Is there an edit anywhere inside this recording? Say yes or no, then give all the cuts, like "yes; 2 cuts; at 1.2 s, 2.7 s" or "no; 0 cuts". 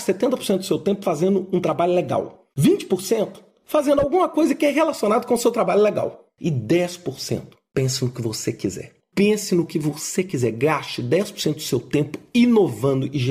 no; 0 cuts